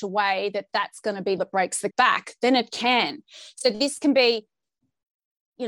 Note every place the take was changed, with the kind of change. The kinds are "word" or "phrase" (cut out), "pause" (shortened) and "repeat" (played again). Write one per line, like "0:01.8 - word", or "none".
0:01.4 - word
0:01.9 - word